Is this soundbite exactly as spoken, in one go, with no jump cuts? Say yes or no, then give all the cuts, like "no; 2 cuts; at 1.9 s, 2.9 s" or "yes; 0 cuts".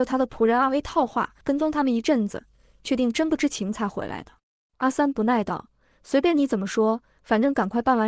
no; 2 cuts; at 1.4 s, 4.4 s